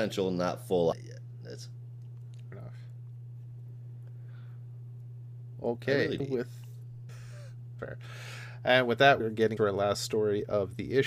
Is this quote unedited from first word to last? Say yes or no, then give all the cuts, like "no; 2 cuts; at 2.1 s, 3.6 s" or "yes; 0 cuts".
no; 7 cuts; at 0.9 s, 2.5 s, 6.2 s, 7.1 s, 7.8 s, 9.2 s, 9.6 s